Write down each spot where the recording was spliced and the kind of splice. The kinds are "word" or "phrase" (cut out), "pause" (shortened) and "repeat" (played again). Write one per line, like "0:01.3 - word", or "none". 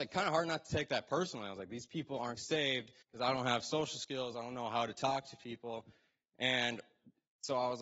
0:02.4 - word
0:03.0 - pause